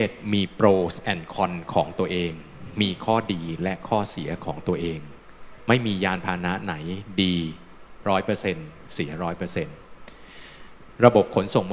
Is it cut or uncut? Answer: uncut